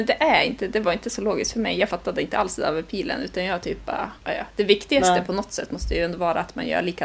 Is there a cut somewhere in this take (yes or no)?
yes